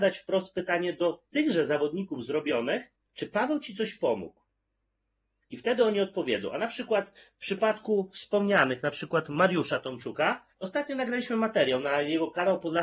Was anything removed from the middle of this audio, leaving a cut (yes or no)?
yes